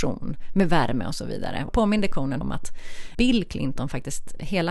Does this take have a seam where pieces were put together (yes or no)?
yes